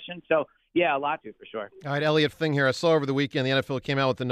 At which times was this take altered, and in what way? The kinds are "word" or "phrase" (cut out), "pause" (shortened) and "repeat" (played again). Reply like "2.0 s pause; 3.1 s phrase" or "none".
1.2 s phrase; 2.3 s word